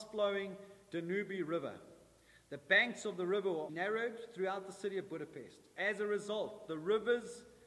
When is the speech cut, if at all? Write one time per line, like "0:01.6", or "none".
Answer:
0:03.7